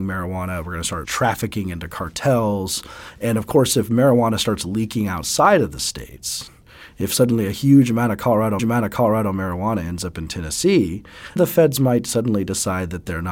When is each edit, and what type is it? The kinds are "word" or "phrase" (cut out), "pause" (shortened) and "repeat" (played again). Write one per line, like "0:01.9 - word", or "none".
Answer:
0:01.0 - word
0:08.6 - repeat
0:11.4 - word